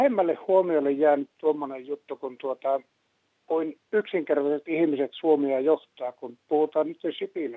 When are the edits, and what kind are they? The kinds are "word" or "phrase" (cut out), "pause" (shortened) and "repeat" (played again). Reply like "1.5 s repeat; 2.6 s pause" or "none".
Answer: none